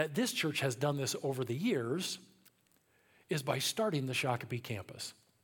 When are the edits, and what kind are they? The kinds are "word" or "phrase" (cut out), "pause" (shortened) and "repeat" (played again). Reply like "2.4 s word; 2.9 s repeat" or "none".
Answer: none